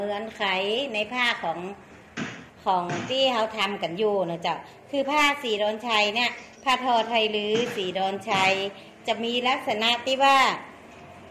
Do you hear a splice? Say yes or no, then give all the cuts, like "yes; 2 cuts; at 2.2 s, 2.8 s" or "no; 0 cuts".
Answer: yes; 1 cut; at 6.5 s